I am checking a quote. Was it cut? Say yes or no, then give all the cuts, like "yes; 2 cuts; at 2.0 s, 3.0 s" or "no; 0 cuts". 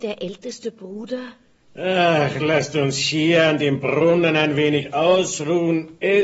no; 0 cuts